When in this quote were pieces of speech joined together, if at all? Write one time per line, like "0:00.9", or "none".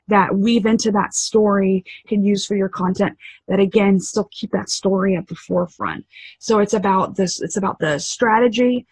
0:02.0

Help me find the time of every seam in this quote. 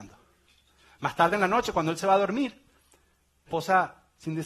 0:03.5

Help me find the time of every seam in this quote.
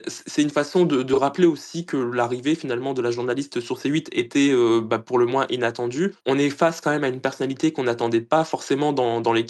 0:06.2

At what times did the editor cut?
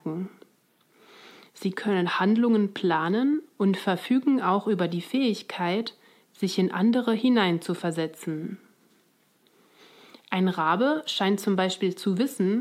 none

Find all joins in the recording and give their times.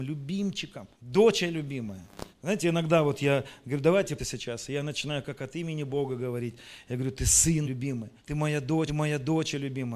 0:00.9
0:02.3
0:04.2
0:07.6
0:08.2
0:08.9

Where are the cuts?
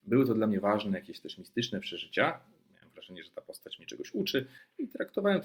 none

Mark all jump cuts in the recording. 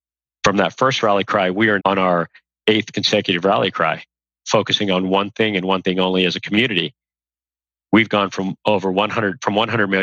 0:01.8

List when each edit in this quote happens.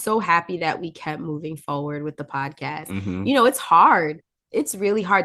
none

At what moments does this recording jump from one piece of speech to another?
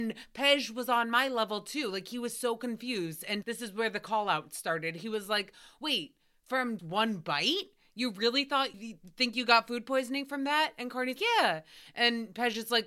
0:03.4
0:06.8
0:08.7
0:11.2

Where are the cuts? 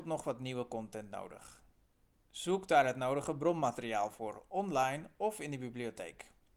none

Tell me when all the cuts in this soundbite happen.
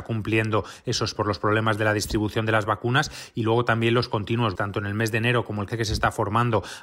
0:01.1
0:04.5
0:05.7

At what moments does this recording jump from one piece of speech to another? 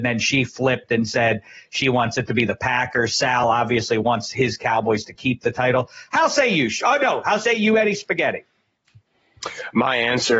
none

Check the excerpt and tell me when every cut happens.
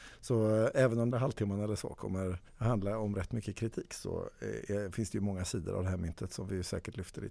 0:01.1
0:02.5

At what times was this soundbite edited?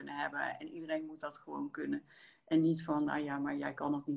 none

